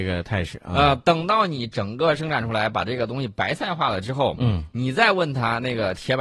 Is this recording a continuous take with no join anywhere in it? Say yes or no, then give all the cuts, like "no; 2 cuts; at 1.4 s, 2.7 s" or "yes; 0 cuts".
yes; 0 cuts